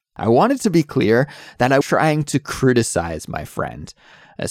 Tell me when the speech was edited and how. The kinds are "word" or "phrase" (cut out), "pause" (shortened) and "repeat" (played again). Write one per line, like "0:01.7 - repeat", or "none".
0:01.8 - word